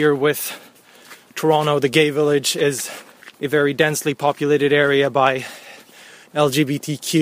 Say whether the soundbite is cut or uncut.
cut